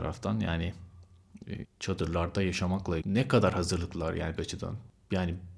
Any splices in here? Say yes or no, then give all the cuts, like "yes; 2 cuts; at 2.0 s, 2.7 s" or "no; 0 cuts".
yes; 3 cuts; at 1.6 s, 3.0 s, 4.4 s